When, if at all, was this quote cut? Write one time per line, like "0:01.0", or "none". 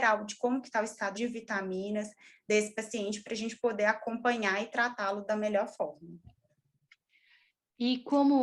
0:01.1